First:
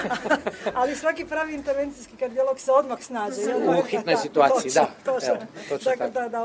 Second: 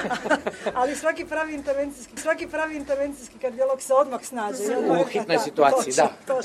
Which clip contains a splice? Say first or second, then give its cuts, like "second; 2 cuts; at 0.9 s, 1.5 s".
second; 1 cut; at 2.2 s